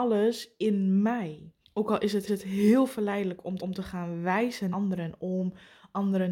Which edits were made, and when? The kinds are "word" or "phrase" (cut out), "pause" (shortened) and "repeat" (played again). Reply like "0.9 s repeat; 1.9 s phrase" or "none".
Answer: 1.6 s pause; 2.3 s repeat; 3.6 s repeat; 4.7 s word